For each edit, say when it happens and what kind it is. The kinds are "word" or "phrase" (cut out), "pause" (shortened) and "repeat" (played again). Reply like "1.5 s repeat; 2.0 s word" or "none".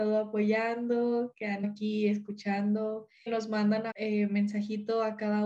1.6 s word; 3.3 s word; 3.9 s word